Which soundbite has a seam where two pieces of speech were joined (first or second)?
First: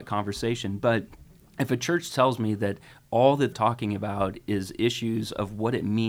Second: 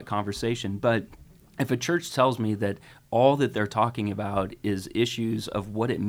first